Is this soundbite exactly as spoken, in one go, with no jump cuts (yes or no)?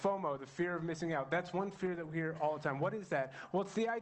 yes